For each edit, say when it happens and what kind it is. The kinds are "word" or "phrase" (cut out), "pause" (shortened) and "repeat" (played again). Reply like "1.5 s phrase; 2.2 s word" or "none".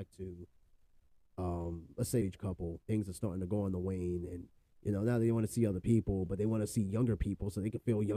2.2 s phrase; 2.8 s pause